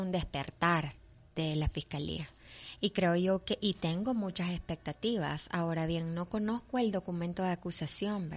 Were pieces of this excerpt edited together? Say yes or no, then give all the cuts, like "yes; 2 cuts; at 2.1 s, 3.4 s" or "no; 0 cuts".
no; 0 cuts